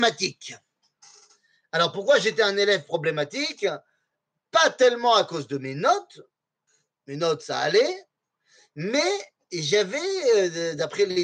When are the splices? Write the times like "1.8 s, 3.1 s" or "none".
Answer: none